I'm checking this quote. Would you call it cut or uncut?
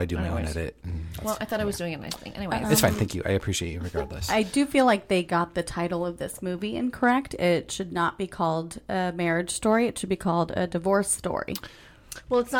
uncut